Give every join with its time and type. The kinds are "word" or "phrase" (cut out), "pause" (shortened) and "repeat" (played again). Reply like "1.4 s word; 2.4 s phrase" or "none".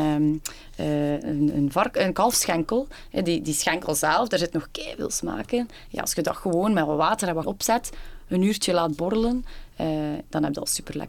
7.4 s word